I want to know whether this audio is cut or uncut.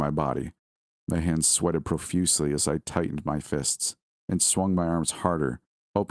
uncut